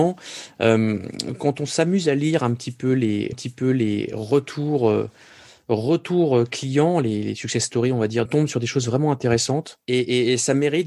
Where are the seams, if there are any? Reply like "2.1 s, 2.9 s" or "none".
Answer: 3.3 s, 8.3 s, 9.8 s

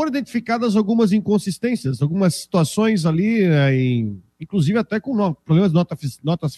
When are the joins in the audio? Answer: none

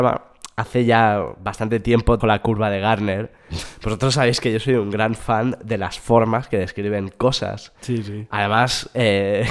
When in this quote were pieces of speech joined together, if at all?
2.2 s

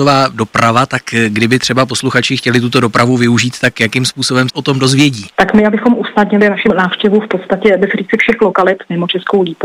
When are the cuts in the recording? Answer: 4.5 s, 6.7 s, 7.8 s

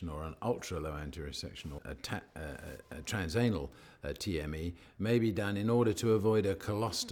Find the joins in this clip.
1.8 s

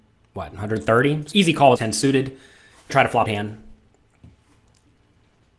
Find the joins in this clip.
1.3 s, 1.8 s, 2.9 s, 3.3 s

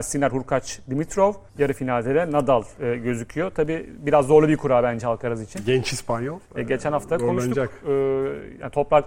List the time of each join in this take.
1.5 s

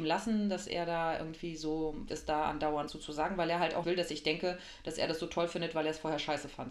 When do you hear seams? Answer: 2.1 s, 2.9 s, 3.8 s

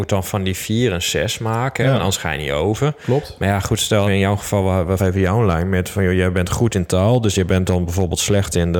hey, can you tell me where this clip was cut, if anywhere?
4.1 s, 5.0 s

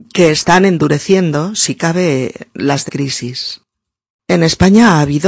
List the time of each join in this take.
2.9 s

